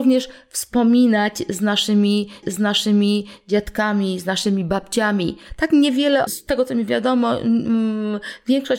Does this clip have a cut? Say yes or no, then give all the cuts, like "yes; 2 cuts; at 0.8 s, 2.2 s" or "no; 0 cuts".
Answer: yes; 2 cuts; at 2.4 s, 6.3 s